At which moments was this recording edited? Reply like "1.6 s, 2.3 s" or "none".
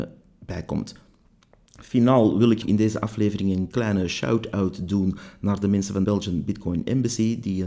2.6 s, 6.0 s